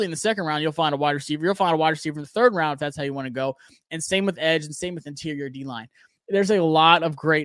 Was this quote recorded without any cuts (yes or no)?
yes